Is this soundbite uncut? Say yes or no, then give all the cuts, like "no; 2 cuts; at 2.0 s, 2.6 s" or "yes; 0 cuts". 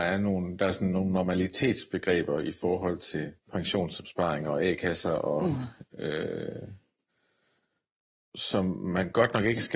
no; 2 cuts; at 3.4 s, 8.3 s